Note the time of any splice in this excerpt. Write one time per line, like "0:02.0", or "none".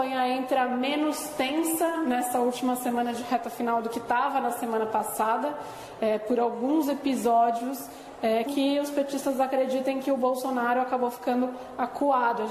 0:08.5